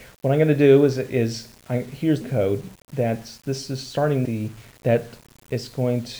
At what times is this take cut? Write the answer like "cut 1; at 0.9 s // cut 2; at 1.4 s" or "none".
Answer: cut 1; at 2.2 s // cut 2; at 2.7 s // cut 3; at 4.2 s